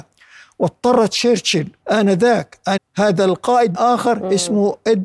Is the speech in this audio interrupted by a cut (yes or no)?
yes